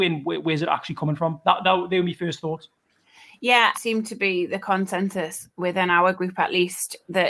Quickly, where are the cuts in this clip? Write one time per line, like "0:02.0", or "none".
0:03.7